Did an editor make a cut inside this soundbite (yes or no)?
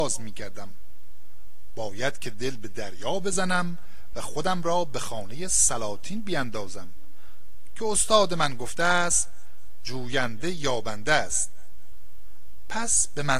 no